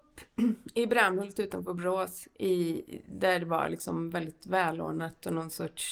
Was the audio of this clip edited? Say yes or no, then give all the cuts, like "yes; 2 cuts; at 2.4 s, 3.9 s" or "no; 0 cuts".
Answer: no; 0 cuts